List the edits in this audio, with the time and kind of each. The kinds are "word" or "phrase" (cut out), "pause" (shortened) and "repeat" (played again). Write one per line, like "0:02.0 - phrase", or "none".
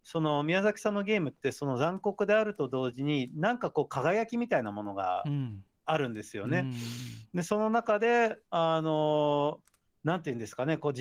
none